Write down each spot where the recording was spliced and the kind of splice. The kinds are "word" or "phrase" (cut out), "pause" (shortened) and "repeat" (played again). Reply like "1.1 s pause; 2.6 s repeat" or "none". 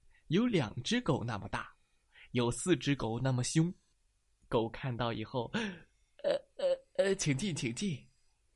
3.9 s pause